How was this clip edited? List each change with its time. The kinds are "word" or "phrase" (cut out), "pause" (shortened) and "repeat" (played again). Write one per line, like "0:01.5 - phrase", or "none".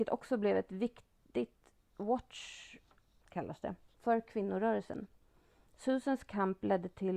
0:03.2 - word
0:03.9 - pause